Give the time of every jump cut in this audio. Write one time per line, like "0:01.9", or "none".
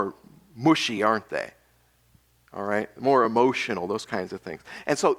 none